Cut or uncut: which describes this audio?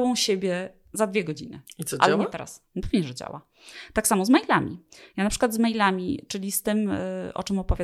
uncut